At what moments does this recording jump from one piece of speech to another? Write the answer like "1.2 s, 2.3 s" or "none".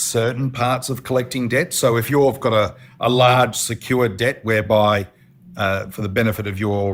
none